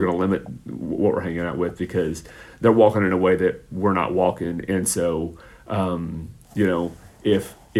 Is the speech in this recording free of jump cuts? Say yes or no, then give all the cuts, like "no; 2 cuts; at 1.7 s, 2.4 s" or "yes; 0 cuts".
yes; 0 cuts